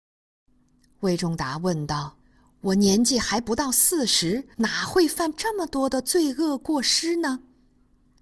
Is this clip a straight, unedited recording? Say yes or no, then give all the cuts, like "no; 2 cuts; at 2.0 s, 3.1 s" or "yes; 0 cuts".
no; 2 cuts; at 2.2 s, 4.5 s